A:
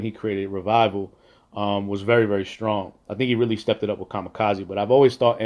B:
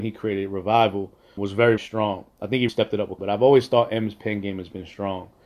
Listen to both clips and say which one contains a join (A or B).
B